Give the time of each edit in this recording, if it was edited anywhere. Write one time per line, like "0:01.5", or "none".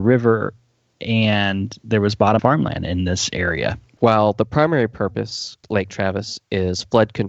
0:02.4
0:05.6